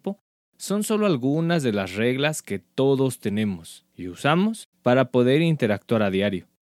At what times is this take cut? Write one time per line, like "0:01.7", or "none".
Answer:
0:03.9
0:04.7

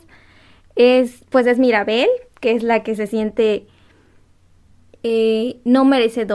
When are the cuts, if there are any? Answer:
none

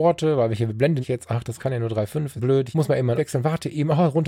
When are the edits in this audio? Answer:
0:01.0
0:01.6
0:02.4
0:02.7
0:03.2

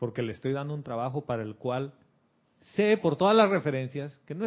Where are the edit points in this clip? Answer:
none

